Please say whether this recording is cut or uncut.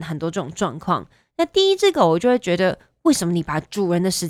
uncut